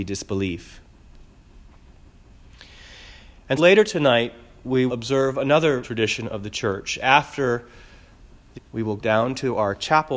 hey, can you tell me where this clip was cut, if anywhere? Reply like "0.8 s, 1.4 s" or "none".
3.6 s, 4.9 s, 5.8 s, 8.5 s, 9.0 s

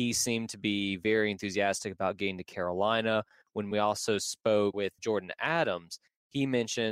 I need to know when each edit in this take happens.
none

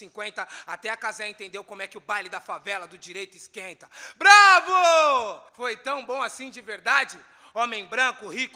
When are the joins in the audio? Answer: 5.5 s

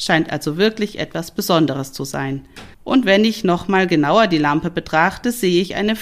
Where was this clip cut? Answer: 2.7 s

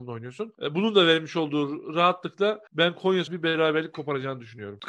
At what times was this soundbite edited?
2.7 s, 3.3 s

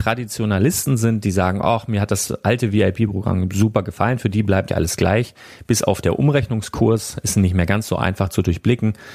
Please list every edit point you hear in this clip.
4.7 s

